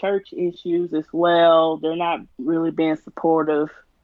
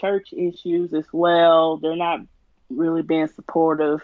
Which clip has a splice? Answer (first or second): first